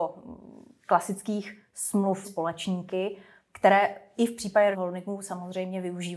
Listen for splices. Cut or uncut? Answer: cut